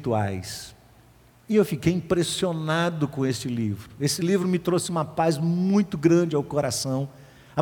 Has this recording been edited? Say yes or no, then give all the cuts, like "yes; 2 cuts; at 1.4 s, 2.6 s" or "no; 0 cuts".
no; 0 cuts